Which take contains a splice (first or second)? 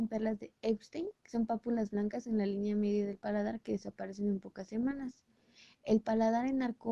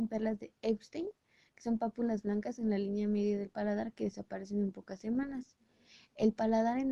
first